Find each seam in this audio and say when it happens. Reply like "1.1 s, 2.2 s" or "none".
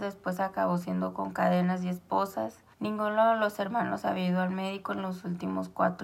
2.7 s